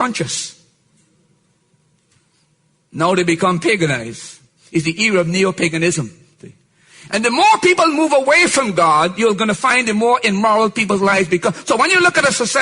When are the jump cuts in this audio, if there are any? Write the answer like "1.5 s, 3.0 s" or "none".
none

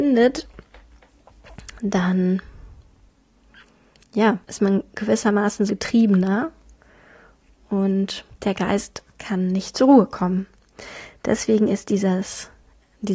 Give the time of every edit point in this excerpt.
4.4 s, 5.7 s, 8.3 s, 9.1 s

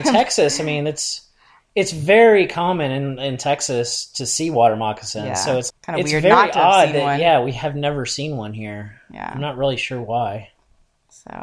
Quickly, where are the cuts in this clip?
5.7 s

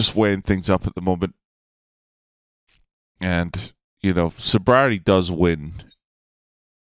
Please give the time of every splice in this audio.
3.8 s

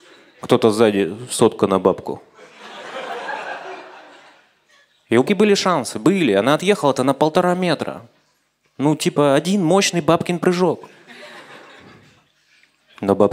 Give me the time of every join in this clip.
5.3 s

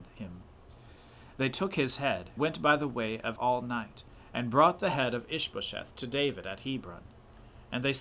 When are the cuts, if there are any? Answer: 2.4 s, 3.4 s

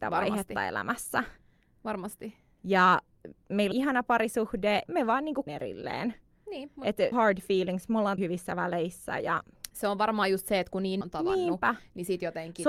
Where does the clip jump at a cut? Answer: 3.7 s, 4.9 s, 5.5 s, 7.1 s, 8.2 s, 11.0 s

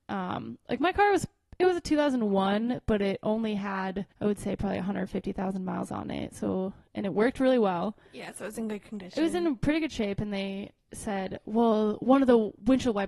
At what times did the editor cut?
4.1 s

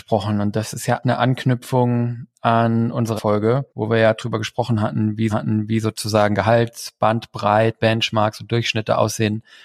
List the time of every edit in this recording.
1.0 s, 3.2 s, 3.7 s, 5.3 s, 7.8 s

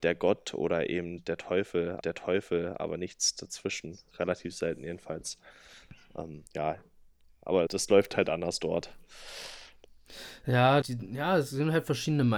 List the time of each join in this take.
2.0 s, 6.5 s, 7.7 s, 10.8 s

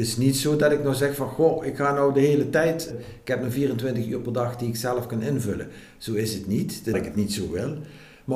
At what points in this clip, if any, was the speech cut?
2.9 s, 6.9 s

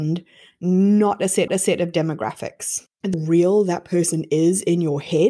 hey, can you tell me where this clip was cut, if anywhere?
1.5 s, 3.1 s

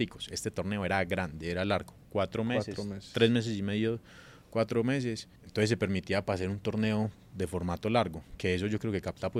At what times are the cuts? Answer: 5.4 s

